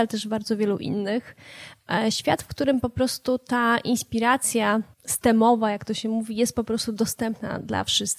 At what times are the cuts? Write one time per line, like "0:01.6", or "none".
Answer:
0:04.9